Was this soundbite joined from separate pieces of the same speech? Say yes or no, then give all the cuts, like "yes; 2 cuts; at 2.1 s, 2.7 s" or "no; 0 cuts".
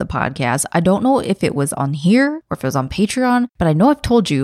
no; 0 cuts